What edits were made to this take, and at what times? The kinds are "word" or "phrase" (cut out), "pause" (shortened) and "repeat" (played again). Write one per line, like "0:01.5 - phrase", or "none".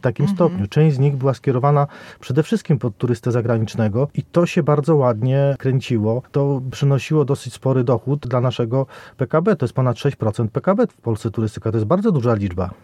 none